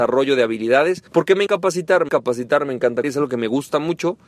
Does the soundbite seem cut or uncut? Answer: cut